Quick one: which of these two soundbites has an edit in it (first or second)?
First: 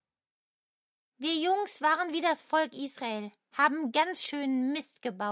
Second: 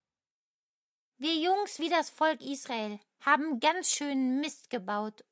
second